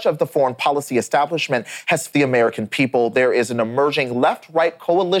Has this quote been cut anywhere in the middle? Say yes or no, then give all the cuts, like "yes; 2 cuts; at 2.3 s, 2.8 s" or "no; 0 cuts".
yes; 1 cut; at 2.1 s